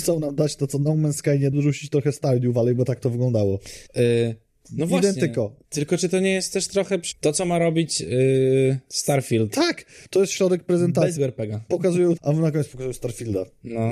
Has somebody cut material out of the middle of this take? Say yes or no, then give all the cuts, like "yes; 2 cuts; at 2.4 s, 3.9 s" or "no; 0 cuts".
yes; 6 cuts; at 1.5 s, 3.9 s, 5.6 s, 7.1 s, 11.2 s, 12.2 s